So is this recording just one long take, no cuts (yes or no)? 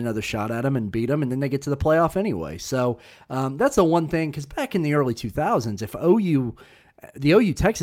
yes